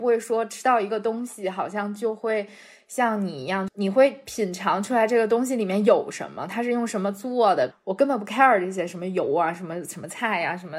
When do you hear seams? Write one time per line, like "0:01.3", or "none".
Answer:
none